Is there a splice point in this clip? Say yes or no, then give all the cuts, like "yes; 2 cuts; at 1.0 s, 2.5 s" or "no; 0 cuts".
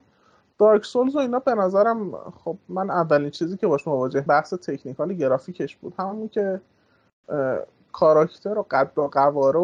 yes; 1 cut; at 4.3 s